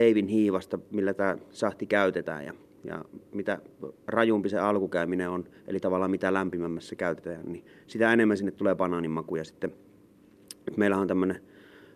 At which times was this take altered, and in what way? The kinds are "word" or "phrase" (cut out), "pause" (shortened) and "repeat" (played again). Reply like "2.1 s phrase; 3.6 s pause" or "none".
none